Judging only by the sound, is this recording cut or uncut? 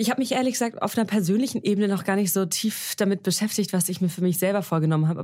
uncut